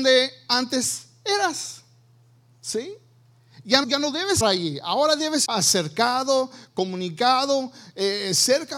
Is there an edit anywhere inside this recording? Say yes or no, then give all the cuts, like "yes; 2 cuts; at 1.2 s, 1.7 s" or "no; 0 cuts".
yes; 3 cuts; at 3.8 s, 4.4 s, 5.5 s